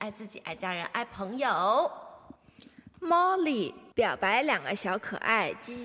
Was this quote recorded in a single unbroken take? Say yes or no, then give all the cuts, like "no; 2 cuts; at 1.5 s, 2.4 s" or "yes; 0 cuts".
no; 1 cut; at 3.9 s